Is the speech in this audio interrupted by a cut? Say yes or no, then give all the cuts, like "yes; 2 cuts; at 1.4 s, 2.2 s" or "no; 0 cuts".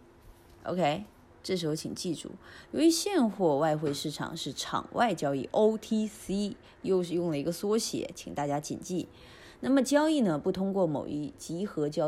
no; 0 cuts